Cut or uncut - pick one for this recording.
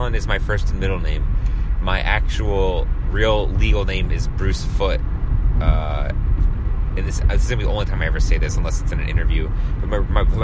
uncut